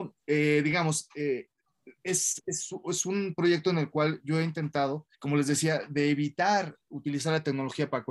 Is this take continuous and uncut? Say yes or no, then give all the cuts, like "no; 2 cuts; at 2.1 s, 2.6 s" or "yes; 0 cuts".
no; 1 cut; at 5.1 s